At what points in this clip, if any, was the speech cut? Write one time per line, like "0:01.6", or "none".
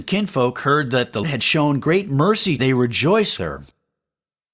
0:01.2
0:02.6
0:03.4